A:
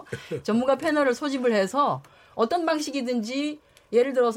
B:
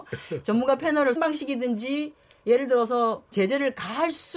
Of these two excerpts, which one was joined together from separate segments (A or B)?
B